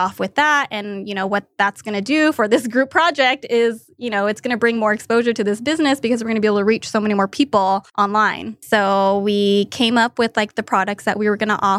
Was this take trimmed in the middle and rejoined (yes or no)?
yes